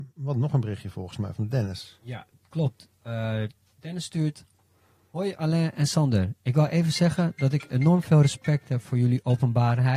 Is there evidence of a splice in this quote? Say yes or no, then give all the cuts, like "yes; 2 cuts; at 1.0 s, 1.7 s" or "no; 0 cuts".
no; 0 cuts